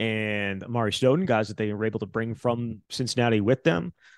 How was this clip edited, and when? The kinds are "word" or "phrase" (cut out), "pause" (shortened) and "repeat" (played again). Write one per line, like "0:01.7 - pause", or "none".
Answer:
0:02.8 - pause